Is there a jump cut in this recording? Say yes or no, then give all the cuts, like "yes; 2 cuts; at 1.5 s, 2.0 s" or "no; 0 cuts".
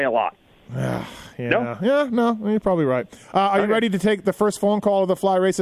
no; 0 cuts